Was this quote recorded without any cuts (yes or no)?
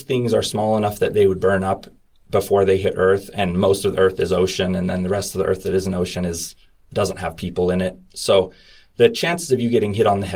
yes